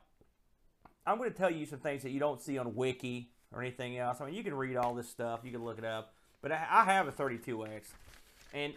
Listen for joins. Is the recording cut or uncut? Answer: uncut